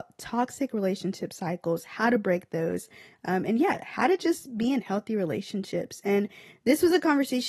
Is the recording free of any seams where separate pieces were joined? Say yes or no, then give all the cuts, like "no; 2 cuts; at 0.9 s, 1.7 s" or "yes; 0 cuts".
yes; 0 cuts